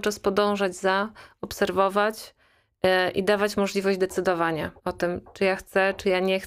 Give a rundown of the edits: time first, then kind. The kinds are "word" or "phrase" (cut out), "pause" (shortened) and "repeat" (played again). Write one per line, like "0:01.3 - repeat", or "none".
0:04.8 - pause